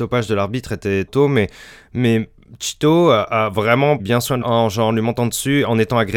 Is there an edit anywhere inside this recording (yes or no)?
yes